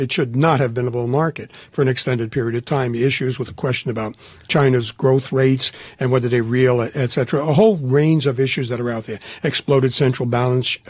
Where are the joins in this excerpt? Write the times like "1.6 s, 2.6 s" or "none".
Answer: none